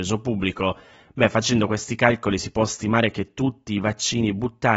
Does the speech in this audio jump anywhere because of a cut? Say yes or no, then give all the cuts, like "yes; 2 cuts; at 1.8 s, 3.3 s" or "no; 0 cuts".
no; 0 cuts